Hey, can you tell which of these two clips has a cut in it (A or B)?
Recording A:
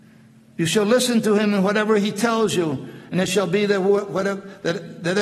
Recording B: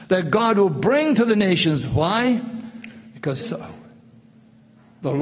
B